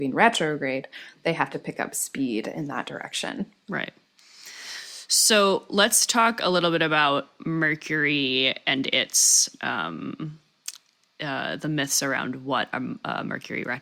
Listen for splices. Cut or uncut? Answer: uncut